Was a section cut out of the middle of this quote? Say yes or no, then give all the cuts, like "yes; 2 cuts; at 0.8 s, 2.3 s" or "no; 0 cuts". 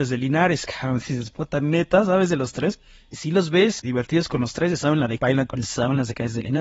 yes; 3 cuts; at 3.8 s, 5.2 s, 5.5 s